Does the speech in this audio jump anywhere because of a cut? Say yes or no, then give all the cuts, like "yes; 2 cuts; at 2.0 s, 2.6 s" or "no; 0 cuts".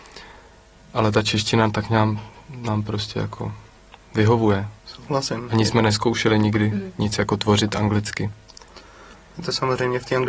yes; 1 cut; at 4.8 s